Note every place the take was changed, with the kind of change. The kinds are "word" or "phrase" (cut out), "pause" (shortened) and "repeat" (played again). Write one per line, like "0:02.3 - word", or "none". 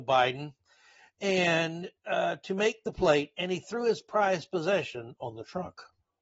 0:02.0 - pause